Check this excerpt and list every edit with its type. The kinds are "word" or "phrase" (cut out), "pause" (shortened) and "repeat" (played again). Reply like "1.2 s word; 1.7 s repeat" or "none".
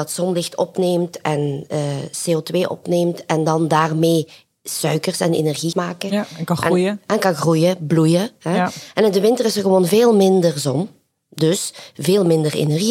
5.7 s word